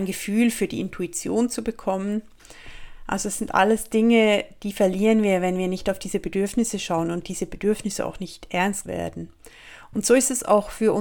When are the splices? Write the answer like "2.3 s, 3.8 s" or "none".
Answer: 8.9 s